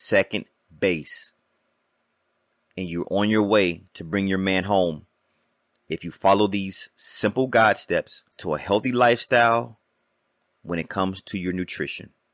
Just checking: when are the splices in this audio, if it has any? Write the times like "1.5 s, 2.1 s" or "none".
3.9 s, 8.3 s